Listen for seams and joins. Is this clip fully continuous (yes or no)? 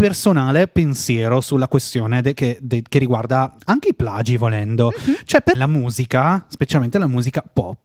no